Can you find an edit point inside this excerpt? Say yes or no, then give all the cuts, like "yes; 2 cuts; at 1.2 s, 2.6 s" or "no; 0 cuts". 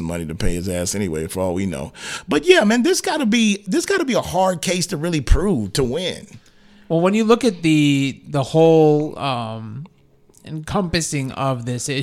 no; 0 cuts